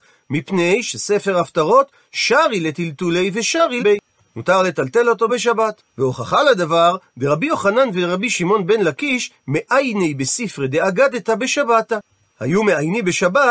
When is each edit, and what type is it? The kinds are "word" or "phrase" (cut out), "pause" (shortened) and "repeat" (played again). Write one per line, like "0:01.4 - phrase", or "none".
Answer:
0:03.8 - word
0:05.3 - phrase
0:05.9 - pause